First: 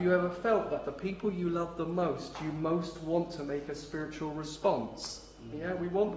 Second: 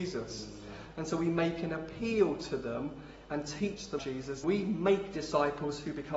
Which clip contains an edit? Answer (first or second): second